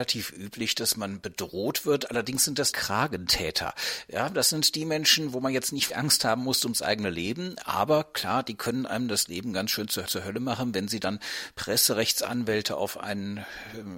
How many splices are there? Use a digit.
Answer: 3